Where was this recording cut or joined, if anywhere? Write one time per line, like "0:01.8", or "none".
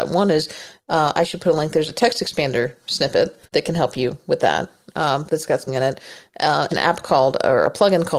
0:03.5
0:05.3
0:05.7
0:06.7